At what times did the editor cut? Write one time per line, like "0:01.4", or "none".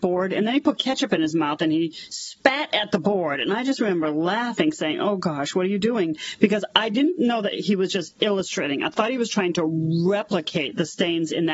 none